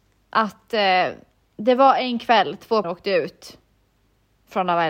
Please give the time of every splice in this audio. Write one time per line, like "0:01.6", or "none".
0:02.8